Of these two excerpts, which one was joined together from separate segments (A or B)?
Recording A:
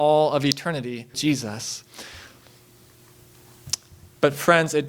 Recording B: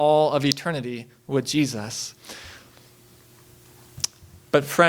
A